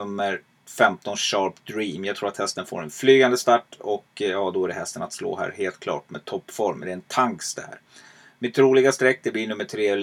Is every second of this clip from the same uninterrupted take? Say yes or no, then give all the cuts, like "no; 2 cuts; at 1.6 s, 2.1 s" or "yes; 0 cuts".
yes; 0 cuts